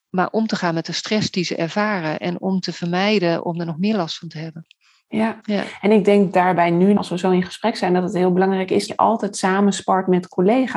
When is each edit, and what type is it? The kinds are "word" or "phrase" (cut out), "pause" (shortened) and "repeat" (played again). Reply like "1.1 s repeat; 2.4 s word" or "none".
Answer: 7.0 s word; 8.9 s word